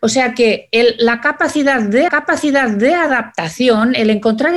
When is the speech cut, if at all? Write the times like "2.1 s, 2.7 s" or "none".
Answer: 2.1 s

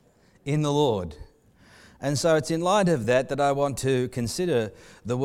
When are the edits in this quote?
none

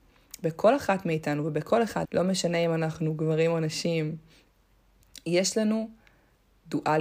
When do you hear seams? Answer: 2.0 s

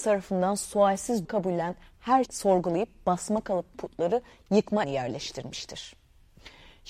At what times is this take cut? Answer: 1.2 s, 2.3 s, 3.7 s, 4.8 s

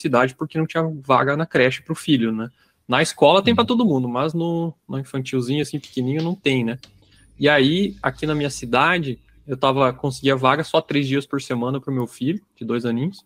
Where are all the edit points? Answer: none

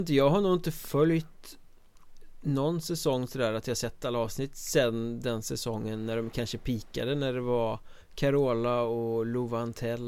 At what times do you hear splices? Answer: 8.0 s

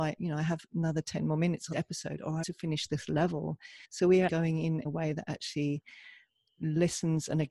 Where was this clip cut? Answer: 1.7 s, 2.4 s, 3.8 s, 4.3 s, 4.8 s

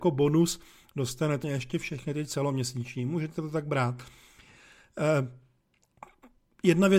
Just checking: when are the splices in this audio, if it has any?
1.4 s

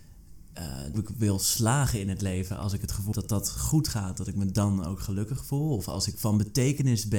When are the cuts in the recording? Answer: 0.9 s, 3.1 s

